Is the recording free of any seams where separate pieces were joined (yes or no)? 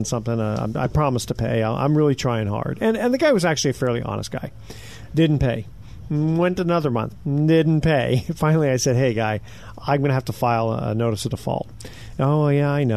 yes